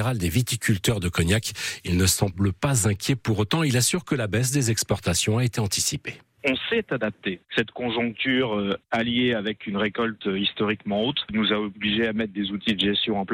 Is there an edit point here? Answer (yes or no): no